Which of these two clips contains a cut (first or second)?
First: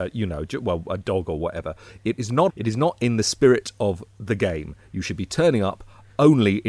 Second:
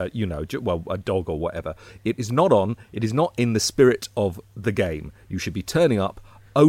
first